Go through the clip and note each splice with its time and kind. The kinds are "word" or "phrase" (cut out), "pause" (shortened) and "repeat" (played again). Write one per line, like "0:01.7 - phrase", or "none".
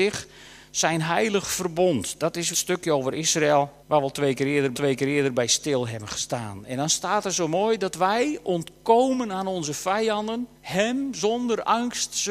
0:02.5 - phrase
0:03.8 - pause
0:04.7 - repeat
0:10.6 - pause